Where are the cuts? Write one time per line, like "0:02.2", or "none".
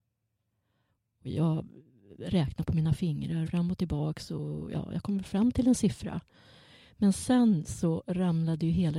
0:03.5